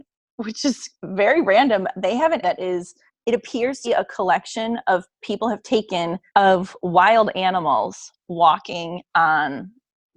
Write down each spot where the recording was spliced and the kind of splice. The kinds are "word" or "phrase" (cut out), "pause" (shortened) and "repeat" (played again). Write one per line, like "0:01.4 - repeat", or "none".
0:01.0 - pause
0:02.4 - word
0:03.1 - pause
0:03.8 - word
0:05.2 - phrase
0:06.3 - pause